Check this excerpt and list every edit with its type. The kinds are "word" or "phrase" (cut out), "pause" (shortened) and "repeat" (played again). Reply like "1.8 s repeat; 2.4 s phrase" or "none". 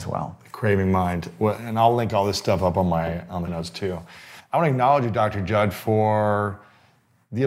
3.5 s word